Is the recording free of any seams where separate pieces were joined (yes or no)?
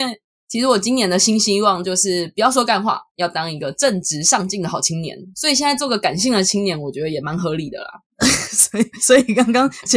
no